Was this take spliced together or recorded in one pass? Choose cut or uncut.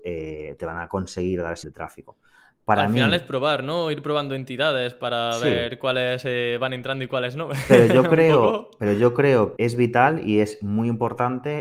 cut